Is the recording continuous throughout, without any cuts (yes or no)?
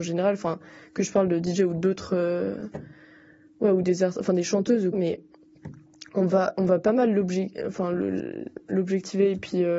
no